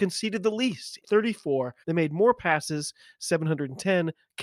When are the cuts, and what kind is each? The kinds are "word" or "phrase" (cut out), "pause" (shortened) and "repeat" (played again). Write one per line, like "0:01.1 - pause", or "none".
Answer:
0:01.0 - word
0:01.8 - pause